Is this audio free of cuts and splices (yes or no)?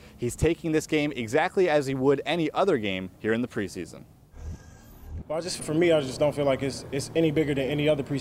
no